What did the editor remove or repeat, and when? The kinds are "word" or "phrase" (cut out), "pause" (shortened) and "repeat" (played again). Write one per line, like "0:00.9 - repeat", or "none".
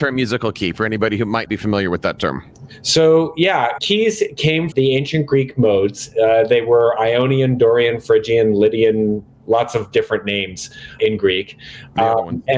0:01.5 - word
0:03.8 - word
0:04.7 - word
0:11.0 - word